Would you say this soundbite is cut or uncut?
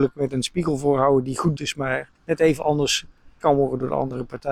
cut